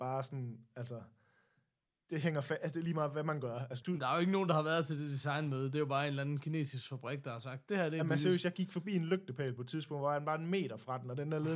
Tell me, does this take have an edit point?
yes; 1 cut; at 3.8 s

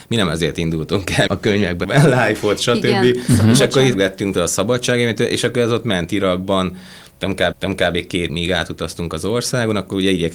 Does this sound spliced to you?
yes; 6 cuts; at 1.3 s, 1.8 s, 3.9 s, 4.3 s, 7.5 s, 8.3 s

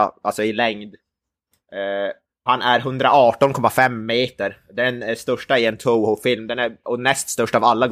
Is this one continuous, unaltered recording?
no; 1 cut; at 2.5 s

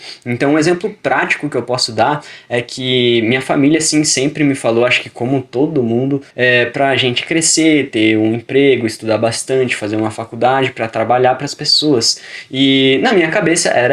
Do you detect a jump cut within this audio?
yes; 1 cut; at 6.3 s

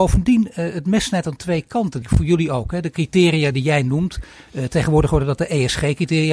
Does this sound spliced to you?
yes; 1 cut; at 2.0 s

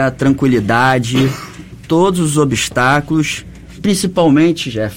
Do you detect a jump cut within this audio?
yes; 2 cuts; at 1.7 s, 3.8 s

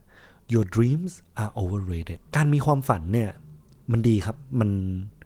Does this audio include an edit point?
yes; 1 cut; at 2.3 s

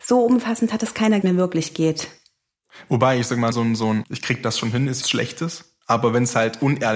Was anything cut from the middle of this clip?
yes; 5 cuts; at 1.2 s, 3.5 s, 4.0 s, 5.0 s, 5.8 s

